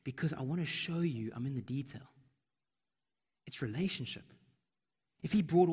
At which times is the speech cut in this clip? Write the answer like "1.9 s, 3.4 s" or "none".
none